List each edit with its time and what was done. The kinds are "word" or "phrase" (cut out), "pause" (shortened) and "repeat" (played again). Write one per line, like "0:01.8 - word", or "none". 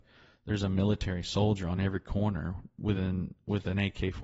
none